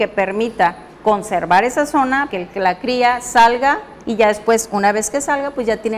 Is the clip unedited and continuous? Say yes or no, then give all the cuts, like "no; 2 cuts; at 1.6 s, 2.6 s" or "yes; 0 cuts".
no; 3 cuts; at 0.9 s, 2.3 s, 4.0 s